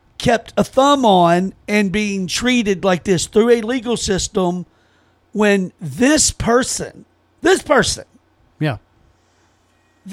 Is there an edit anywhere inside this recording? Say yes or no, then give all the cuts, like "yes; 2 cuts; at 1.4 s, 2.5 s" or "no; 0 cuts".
no; 0 cuts